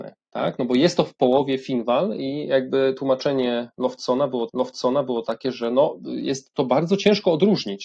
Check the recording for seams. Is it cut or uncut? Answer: cut